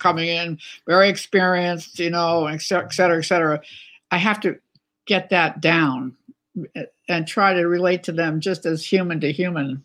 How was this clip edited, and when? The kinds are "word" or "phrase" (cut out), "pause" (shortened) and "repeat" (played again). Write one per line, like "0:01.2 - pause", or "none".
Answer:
none